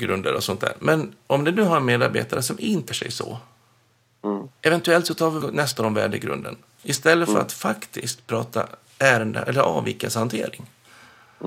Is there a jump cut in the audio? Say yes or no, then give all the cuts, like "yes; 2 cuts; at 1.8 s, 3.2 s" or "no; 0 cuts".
yes; 4 cuts; at 2.9 s, 4.6 s, 5.4 s, 5.8 s